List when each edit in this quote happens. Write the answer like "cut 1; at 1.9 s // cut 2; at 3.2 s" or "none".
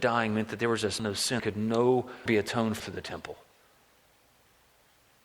cut 1; at 1.0 s // cut 2; at 1.4 s // cut 3; at 2.3 s // cut 4; at 2.8 s